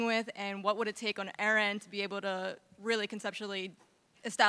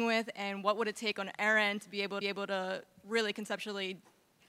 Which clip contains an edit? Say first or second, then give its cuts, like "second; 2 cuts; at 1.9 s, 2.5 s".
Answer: second; 1 cut; at 2.2 s